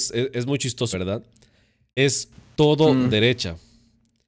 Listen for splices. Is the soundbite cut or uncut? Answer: cut